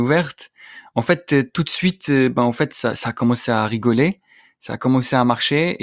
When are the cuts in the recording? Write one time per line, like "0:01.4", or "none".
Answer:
none